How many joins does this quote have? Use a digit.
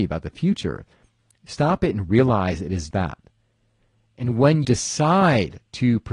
2